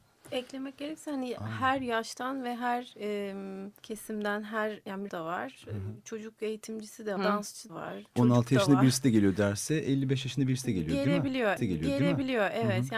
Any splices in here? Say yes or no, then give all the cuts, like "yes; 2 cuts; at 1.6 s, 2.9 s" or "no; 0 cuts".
yes; 5 cuts; at 3.8 s, 5.1 s, 7.2 s, 7.7 s, 11.6 s